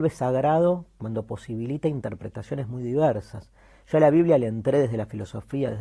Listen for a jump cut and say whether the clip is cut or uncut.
uncut